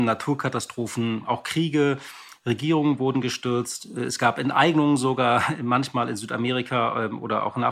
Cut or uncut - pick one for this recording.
uncut